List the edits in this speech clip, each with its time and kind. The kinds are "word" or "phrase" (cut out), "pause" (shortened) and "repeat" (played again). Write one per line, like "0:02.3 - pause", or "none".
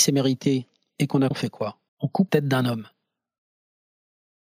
0:01.3 - word
0:01.9 - pause
0:02.3 - word